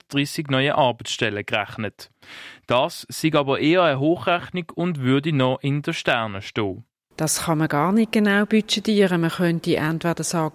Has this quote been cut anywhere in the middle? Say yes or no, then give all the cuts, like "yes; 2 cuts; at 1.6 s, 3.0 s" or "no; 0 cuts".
no; 0 cuts